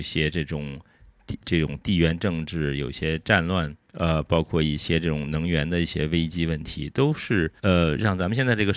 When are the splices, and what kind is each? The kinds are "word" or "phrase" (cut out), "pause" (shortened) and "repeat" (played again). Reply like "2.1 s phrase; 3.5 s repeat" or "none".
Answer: 3.8 s pause; 7.6 s pause